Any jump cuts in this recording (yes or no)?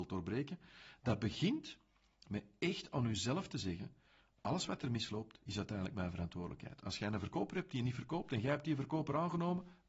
no